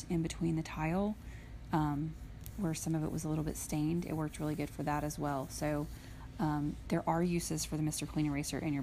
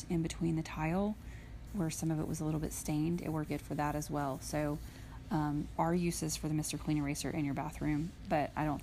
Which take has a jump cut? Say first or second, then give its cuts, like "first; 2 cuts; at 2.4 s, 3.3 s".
second; 3 cuts; at 1.7 s, 3.5 s, 5.8 s